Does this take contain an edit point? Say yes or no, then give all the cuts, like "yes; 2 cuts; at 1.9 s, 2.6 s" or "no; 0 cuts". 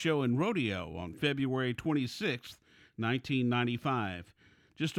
no; 0 cuts